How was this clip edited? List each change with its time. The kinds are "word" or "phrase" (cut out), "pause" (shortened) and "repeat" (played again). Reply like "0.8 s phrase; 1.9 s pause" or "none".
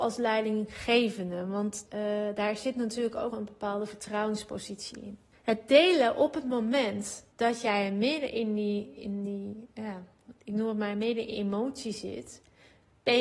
1.9 s phrase; 3.3 s word; 5.3 s pause; 7.3 s pause; 11.3 s word